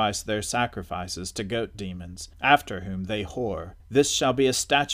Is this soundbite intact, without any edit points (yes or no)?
no